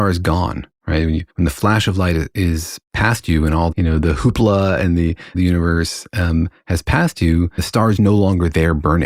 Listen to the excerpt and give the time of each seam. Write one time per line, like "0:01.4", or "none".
0:01.3
0:03.7
0:05.3
0:07.6
0:08.0